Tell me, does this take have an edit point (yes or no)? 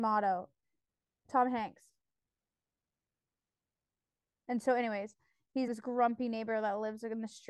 yes